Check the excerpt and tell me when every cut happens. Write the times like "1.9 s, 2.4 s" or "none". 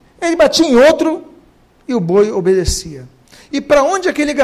none